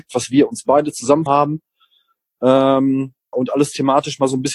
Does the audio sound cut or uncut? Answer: cut